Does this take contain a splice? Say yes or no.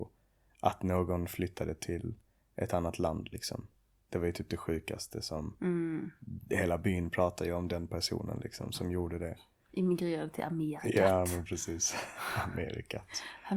no